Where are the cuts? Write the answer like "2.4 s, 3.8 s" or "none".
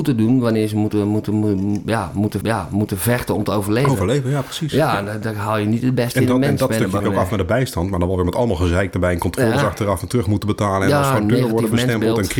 2.4 s, 7.0 s